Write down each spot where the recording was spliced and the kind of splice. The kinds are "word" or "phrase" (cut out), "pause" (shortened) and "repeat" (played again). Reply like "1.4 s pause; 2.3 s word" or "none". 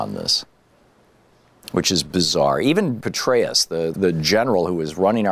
3.0 s word; 3.9 s word